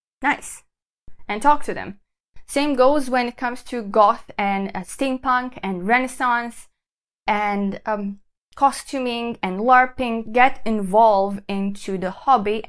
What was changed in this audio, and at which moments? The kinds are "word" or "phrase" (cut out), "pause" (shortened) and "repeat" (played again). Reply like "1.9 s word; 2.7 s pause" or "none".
10.3 s word